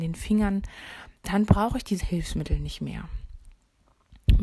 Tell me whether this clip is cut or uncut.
cut